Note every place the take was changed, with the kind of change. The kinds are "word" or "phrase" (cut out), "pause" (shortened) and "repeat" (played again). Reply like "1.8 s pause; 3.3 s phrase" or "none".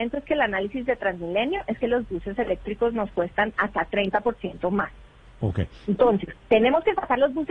none

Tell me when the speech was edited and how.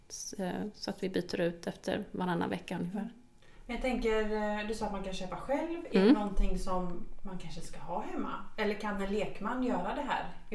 none

